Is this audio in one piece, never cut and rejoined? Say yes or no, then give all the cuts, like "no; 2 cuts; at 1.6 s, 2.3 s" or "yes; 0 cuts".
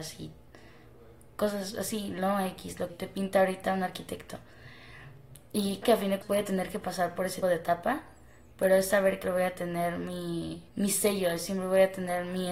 no; 6 cuts; at 2.9 s, 5.8 s, 6.2 s, 7.4 s, 9.2 s, 10.7 s